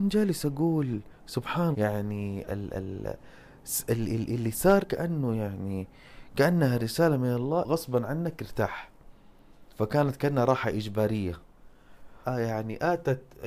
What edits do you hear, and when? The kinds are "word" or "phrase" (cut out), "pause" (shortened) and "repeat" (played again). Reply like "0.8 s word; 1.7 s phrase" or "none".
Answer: 1.7 s word; 2.5 s word; 4.8 s word; 7.6 s word; 9.7 s pause; 12.2 s phrase